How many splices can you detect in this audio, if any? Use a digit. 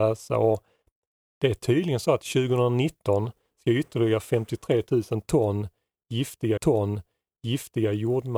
1